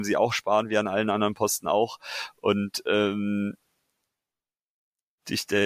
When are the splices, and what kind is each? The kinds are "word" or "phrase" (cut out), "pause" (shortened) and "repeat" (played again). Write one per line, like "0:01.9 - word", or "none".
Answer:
none